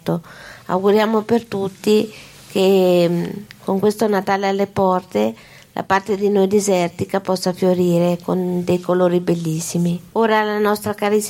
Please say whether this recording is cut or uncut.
uncut